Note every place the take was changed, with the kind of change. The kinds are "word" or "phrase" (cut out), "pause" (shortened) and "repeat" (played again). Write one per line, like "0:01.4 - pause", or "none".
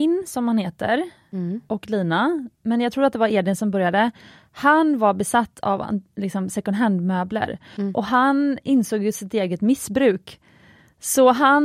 none